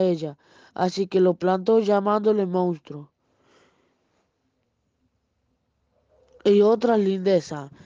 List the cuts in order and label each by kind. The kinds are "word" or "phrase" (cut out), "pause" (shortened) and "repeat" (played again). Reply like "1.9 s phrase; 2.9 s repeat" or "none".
none